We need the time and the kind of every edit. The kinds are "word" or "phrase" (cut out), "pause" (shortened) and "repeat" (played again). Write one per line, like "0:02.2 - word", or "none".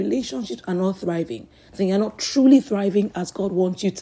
none